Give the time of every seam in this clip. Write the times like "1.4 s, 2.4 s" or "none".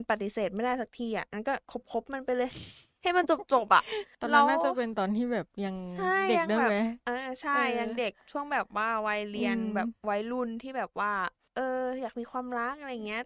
1.6 s, 7.0 s